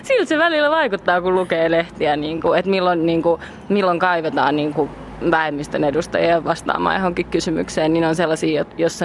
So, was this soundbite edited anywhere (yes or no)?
no